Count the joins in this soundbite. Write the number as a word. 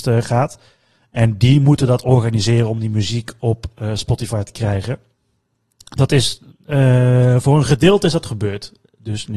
zero